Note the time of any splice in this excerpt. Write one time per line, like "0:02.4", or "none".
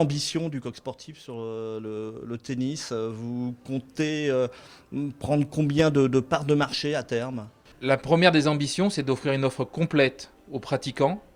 none